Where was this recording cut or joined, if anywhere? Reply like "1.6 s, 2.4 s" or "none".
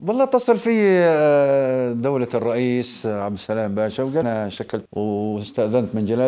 4.2 s, 4.9 s